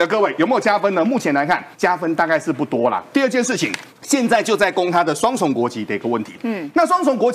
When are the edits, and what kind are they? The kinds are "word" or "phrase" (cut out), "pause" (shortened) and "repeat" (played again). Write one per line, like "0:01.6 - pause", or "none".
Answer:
0:01.7 - pause
0:03.9 - pause